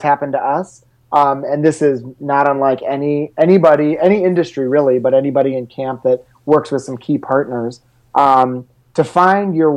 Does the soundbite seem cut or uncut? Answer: uncut